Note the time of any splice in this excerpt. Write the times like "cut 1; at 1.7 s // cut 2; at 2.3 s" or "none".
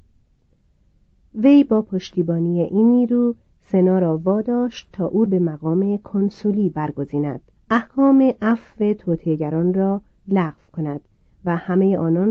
cut 1; at 5.3 s // cut 2; at 7.5 s